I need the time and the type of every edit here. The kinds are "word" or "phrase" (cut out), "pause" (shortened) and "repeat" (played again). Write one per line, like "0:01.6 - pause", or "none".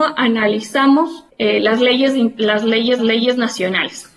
0:01.3 - pause
0:03.0 - repeat